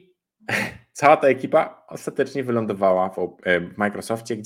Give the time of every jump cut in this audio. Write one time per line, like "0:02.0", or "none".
none